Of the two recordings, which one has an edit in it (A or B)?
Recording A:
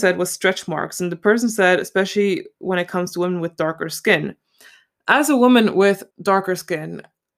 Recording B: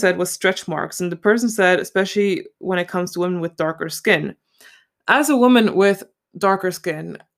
A